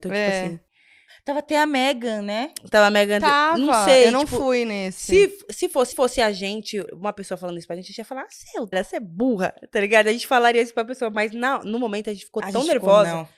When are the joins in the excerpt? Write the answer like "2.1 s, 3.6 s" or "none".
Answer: 5.9 s, 6.9 s, 8.7 s

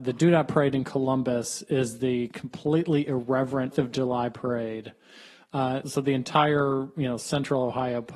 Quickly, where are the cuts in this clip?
3.7 s, 5.8 s

